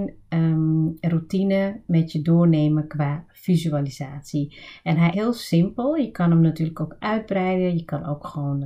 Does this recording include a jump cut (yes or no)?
yes